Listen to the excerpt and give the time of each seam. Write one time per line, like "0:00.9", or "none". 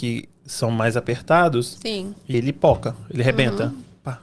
0:02.3